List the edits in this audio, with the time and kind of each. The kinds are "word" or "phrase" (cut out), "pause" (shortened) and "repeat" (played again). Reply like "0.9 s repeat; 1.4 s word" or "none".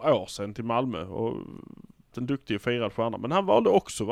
2.1 s word